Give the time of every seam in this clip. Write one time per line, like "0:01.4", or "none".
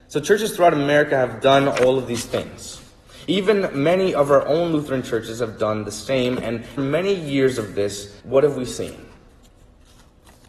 0:06.8
0:08.2